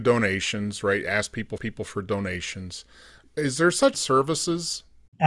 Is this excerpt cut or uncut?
cut